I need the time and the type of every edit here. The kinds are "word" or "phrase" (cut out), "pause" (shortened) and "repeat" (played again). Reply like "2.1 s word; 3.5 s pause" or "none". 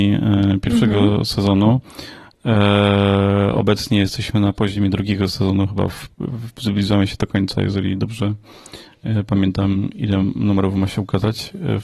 none

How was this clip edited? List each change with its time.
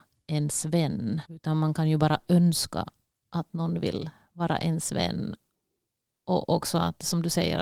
1.3 s pause

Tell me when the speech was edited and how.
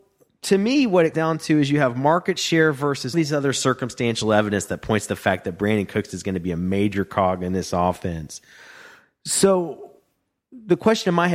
1.1 s word; 3.1 s word

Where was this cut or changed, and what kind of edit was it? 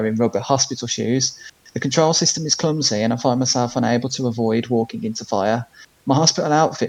none

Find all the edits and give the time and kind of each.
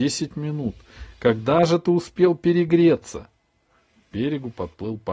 none

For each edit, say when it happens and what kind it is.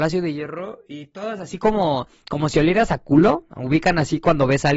none

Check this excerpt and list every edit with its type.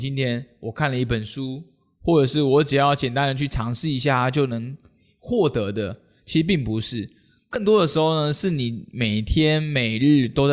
none

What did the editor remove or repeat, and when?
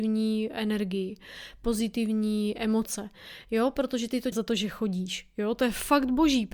4.3 s phrase

